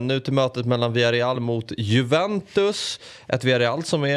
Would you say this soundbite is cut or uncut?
uncut